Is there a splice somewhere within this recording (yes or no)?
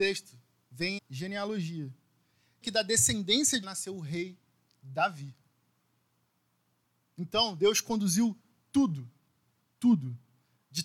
yes